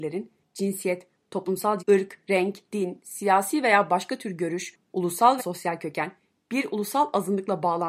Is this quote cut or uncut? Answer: cut